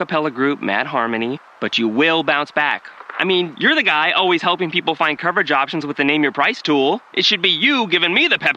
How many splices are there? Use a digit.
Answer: 0